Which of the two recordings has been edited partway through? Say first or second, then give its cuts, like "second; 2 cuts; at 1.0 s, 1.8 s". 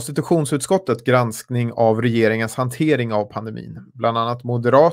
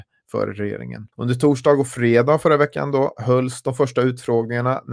second; 1 cut; at 1.1 s